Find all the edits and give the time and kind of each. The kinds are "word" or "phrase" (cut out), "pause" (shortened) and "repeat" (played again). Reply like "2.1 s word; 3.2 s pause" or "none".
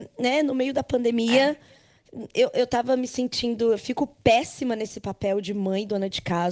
none

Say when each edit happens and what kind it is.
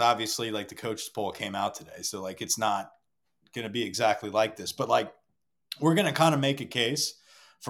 none

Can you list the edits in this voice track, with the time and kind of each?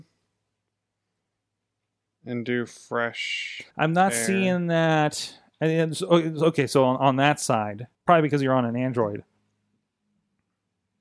3.7 s pause; 7.9 s pause

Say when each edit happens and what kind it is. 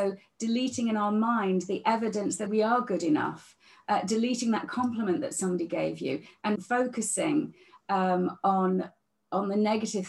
2.5 s word; 6.6 s word

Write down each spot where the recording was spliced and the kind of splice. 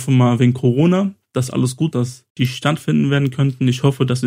1.9 s phrase; 2.3 s pause

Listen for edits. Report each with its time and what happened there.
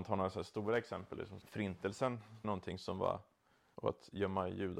1.4 s word; 2.4 s phrase; 3.7 s word

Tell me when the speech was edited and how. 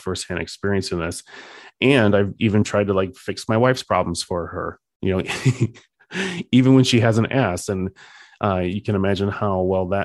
none

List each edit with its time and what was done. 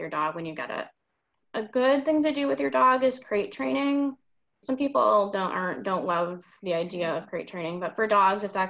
none

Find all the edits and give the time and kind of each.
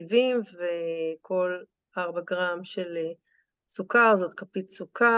none

